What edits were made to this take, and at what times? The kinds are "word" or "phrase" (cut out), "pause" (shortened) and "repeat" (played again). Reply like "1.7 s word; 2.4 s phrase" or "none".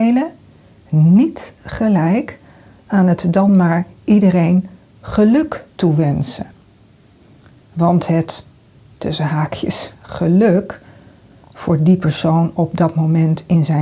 none